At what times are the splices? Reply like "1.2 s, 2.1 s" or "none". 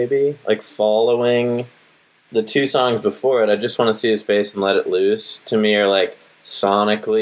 none